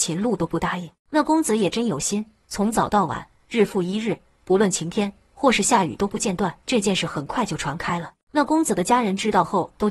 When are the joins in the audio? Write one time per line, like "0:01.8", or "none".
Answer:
0:01.0
0:06.6
0:08.3